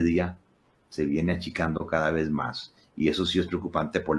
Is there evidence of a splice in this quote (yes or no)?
no